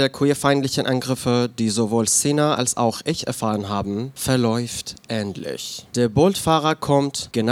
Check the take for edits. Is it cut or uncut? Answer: uncut